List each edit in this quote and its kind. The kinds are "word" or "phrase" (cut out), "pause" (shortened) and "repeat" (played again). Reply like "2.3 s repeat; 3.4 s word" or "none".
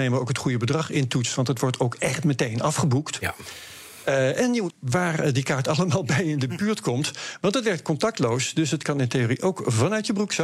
4.7 s word